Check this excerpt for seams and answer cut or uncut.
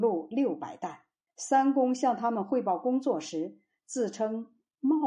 cut